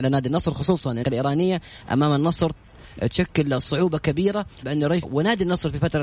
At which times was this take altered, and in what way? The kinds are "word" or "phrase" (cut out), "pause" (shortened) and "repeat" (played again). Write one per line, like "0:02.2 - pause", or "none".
0:01.0 - word
0:04.6 - word
0:05.0 - word